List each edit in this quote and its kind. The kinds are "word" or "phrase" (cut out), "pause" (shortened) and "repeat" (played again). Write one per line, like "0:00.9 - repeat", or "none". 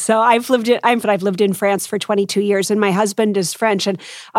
0:01.0 - phrase